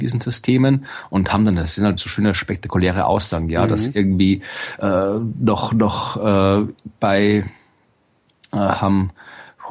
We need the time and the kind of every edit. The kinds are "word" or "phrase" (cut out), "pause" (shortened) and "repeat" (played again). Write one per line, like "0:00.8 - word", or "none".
0:02.0 - word

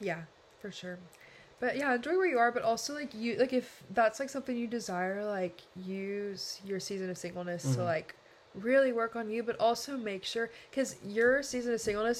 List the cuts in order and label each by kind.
none

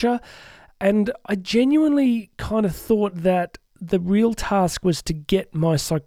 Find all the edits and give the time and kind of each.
none

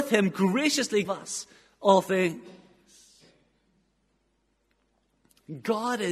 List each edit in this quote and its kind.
0:01.0 - word

